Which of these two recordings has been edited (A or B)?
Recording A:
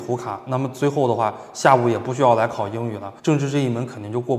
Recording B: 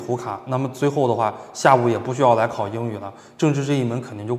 A